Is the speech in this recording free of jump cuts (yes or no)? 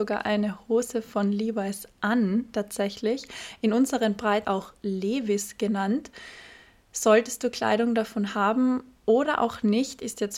no